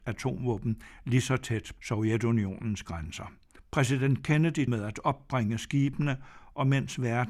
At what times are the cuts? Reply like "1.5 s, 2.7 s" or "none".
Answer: 1.8 s, 3.6 s, 4.7 s